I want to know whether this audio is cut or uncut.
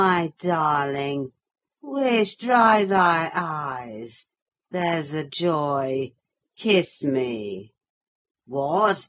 uncut